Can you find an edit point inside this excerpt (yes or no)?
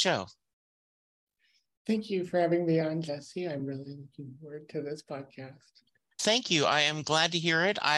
no